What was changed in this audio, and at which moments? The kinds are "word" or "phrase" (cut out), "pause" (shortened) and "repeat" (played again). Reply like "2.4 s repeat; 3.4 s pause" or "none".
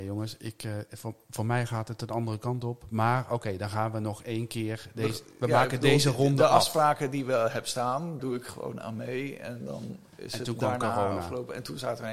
8.2 s word